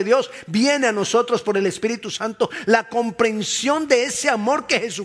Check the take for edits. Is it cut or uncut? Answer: uncut